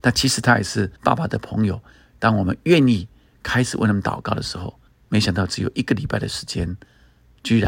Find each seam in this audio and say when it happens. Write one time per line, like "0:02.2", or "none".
0:01.0
0:04.9